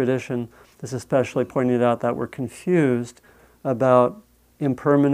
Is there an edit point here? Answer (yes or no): no